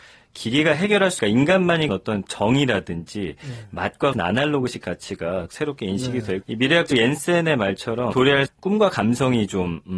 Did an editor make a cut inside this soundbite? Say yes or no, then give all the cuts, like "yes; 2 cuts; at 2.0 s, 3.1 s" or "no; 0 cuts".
yes; 8 cuts; at 1.2 s, 1.9 s, 4.1 s, 5.5 s, 6.4 s, 6.9 s, 8.1 s, 8.5 s